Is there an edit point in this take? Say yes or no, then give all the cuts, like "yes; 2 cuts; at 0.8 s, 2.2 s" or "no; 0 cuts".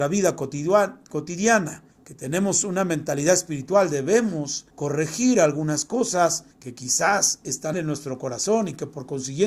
yes; 4 cuts; at 1.9 s, 4.7 s, 6.5 s, 7.7 s